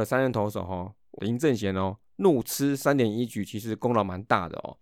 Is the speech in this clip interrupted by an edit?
yes; 1 cut; at 1.2 s

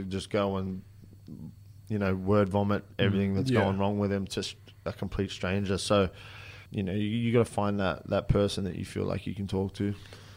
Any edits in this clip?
no; 0 cuts

